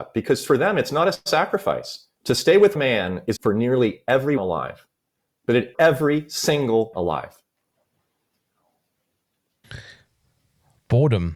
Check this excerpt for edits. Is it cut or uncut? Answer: cut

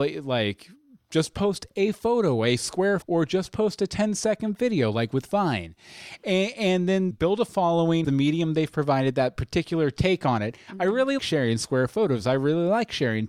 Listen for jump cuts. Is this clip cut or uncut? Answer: cut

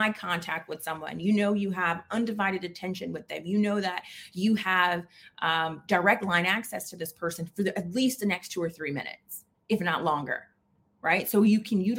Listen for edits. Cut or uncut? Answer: uncut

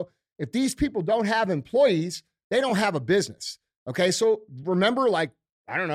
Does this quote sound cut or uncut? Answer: uncut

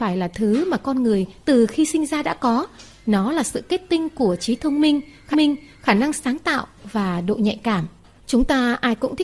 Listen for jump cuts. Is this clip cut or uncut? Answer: cut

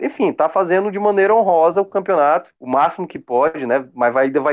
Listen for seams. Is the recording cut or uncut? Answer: cut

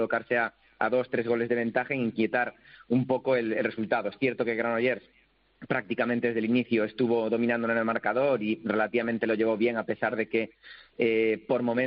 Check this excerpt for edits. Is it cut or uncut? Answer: uncut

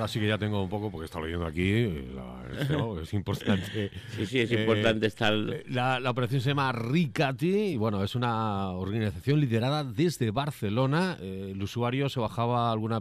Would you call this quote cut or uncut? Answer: uncut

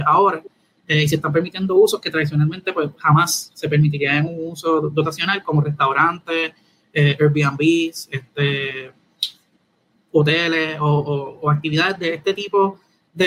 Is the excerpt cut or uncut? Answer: uncut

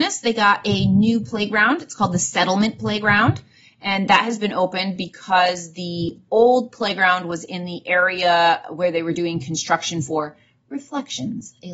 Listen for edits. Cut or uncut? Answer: uncut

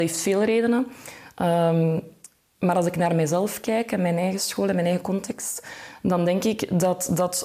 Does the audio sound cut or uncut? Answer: uncut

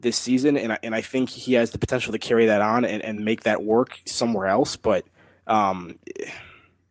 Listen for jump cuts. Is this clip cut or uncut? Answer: uncut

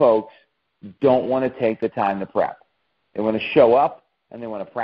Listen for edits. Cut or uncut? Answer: uncut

